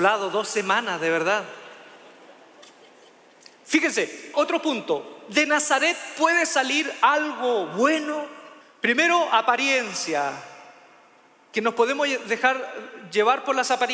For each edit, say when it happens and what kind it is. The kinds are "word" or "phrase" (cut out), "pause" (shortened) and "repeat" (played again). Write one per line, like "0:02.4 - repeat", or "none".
0:04.3 - word
0:08.6 - pause